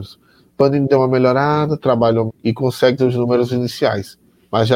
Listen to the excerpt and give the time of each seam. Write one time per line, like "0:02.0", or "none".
0:02.3
0:03.0